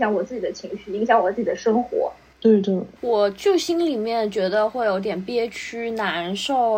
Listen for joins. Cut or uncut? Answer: cut